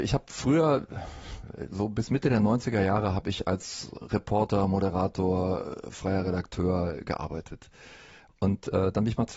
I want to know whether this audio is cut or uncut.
uncut